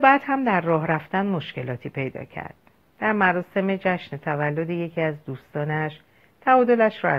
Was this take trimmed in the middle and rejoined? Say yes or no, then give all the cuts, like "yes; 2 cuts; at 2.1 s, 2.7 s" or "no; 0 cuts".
no; 0 cuts